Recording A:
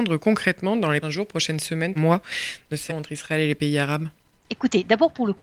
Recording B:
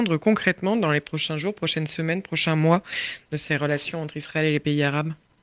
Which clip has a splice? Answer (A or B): A